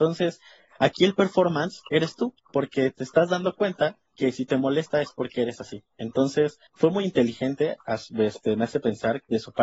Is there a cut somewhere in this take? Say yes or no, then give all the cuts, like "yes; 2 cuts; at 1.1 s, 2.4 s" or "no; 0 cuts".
yes; 2 cuts; at 4.1 s, 6.7 s